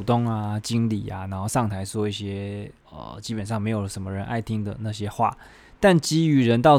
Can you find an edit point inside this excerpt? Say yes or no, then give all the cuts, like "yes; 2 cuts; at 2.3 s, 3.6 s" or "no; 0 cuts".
yes; 1 cut; at 2.8 s